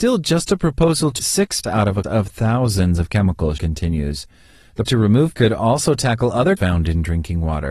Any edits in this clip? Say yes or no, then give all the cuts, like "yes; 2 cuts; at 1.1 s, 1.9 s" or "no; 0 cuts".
yes; 7 cuts; at 1.2 s, 1.6 s, 2.0 s, 3.6 s, 4.9 s, 5.3 s, 6.6 s